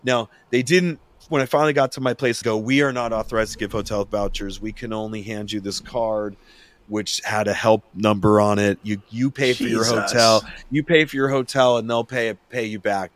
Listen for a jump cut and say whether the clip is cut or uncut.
cut